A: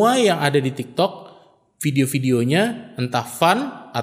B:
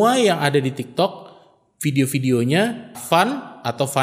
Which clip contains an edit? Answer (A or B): B